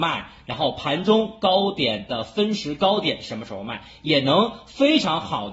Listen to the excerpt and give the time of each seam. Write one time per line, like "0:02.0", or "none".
none